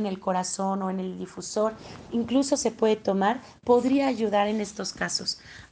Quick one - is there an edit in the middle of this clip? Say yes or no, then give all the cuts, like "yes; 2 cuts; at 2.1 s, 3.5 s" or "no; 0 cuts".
no; 0 cuts